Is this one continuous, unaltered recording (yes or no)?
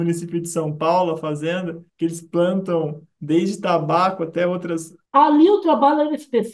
no